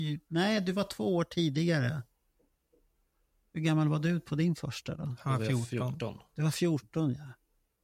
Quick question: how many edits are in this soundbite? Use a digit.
0